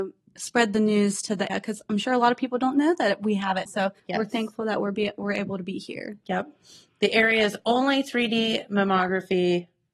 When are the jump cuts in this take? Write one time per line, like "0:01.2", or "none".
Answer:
0:01.5
0:03.7
0:04.0